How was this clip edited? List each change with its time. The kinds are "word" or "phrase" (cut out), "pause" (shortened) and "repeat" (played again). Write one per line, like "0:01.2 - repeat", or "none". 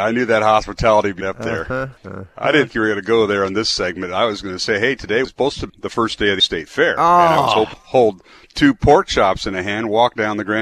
0:01.2 - word
0:02.0 - pause
0:02.7 - word
0:05.2 - word
0:05.7 - word
0:06.4 - word
0:07.7 - word